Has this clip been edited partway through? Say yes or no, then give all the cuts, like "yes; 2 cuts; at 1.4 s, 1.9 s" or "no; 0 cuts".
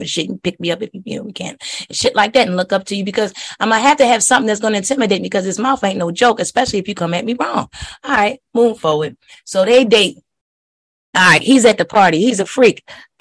no; 0 cuts